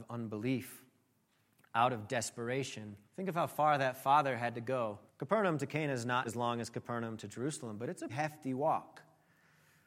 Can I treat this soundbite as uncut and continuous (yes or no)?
no